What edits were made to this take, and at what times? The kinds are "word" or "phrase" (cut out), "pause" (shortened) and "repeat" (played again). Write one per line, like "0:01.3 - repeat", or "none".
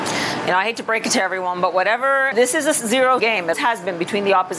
0:02.3 - word
0:03.2 - word
0:03.5 - word